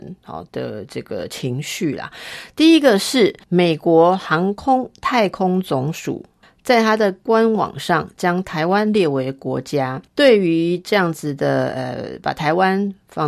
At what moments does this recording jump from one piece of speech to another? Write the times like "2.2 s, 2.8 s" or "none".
3.4 s, 6.4 s, 10.1 s